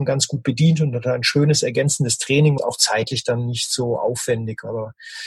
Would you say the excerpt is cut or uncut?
cut